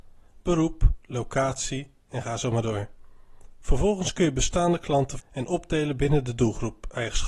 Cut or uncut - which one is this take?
cut